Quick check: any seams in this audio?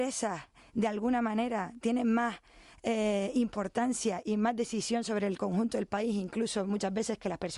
no; 0 cuts

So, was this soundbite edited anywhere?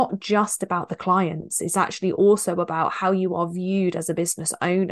no; 0 cuts

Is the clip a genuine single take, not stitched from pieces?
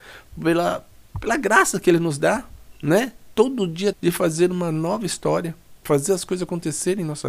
no; 2 cuts; at 1.1 s, 3.9 s

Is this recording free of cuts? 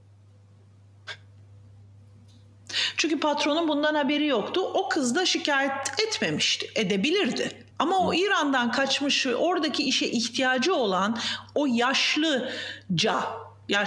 no; 1 cut; at 7.7 s

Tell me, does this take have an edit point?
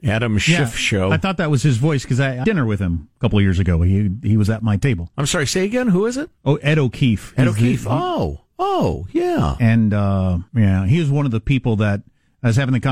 yes; 3 cuts; at 2.4 s, 6.4 s, 10.5 s

